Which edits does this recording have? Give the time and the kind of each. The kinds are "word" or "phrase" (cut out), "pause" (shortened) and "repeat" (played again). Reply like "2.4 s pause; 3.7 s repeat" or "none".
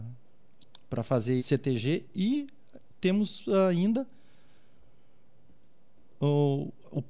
1.4 s word